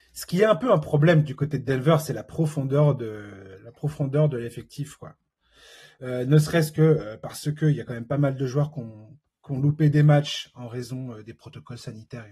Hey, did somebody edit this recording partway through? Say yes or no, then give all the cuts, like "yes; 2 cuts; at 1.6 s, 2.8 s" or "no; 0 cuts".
no; 0 cuts